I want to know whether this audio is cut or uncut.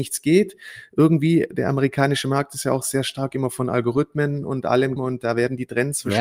cut